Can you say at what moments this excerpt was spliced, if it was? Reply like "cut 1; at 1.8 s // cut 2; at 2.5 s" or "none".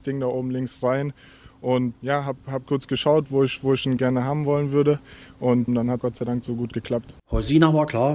cut 1; at 2.0 s // cut 2; at 2.6 s // cut 3; at 4.0 s // cut 4; at 5.7 s // cut 5; at 6.0 s